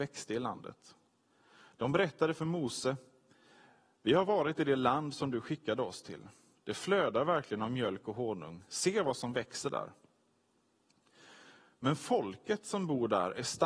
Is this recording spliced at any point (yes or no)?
no